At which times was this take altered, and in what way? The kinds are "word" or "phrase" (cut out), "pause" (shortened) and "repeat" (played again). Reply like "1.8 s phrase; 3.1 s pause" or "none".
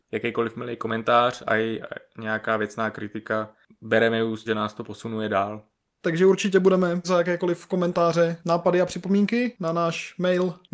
1.4 s word; 4.5 s word; 7.0 s word